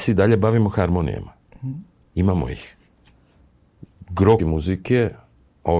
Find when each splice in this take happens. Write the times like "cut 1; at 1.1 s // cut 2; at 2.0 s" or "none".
cut 1; at 4.4 s